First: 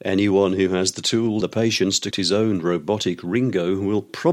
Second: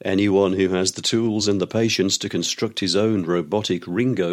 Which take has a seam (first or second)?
first